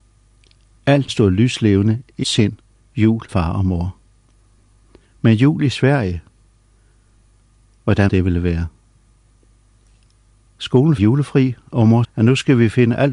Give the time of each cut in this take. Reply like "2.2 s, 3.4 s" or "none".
1.1 s, 2.2 s, 3.3 s, 8.1 s, 11.0 s, 12.0 s